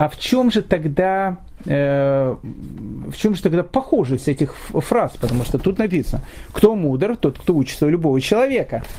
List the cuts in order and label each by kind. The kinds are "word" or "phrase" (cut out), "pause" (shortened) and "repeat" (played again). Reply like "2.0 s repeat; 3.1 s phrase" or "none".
none